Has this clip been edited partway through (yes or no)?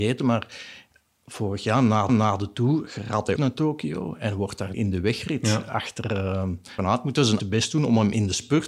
yes